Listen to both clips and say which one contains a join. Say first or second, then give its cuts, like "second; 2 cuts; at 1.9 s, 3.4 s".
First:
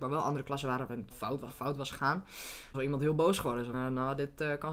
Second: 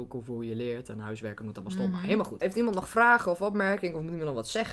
first; 4 cuts; at 1.1 s, 1.5 s, 2.7 s, 3.7 s